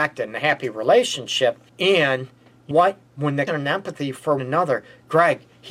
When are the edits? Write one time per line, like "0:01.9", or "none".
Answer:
0:01.7
0:02.7
0:03.1
0:03.5
0:04.4